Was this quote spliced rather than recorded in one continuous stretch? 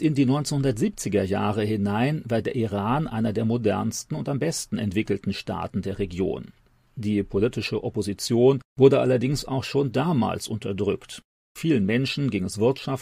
no; 0 cuts

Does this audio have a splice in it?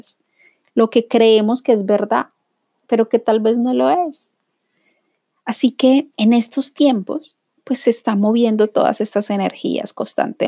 yes; 1 cut; at 6.1 s

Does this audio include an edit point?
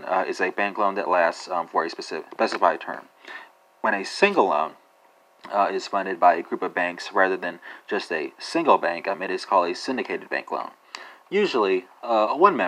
no; 0 cuts

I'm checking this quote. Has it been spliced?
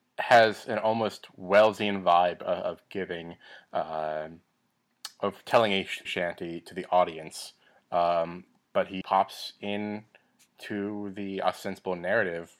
yes; 2 cuts; at 6.0 s, 9.0 s

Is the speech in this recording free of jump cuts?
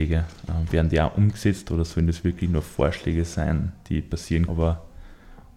no; 1 cut; at 4.5 s

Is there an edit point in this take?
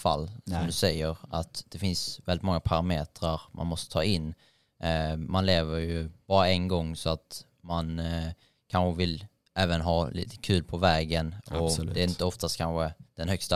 no; 0 cuts

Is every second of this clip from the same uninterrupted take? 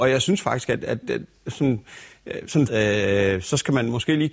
no; 2 cuts; at 1.0 s, 2.7 s

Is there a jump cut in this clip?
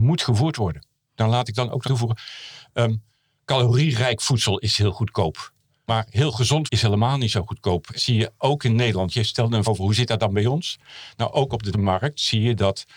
yes; 5 cuts; at 1.9 s, 6.7 s, 8.0 s, 9.6 s, 11.7 s

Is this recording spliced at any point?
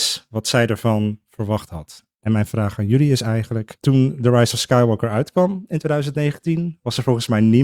no; 0 cuts

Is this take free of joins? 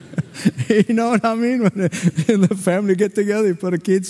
yes; 0 cuts

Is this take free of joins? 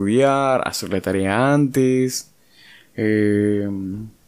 yes; 0 cuts

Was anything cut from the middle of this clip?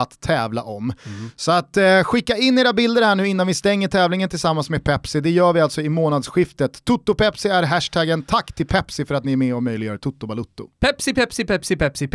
no; 0 cuts

